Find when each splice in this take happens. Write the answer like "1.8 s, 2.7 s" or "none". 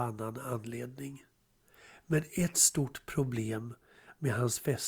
none